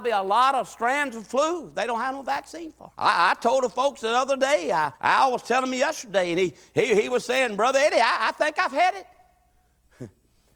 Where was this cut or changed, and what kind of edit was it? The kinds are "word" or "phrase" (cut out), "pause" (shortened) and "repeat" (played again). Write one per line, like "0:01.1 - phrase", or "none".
0:02.9 - pause
0:04.9 - pause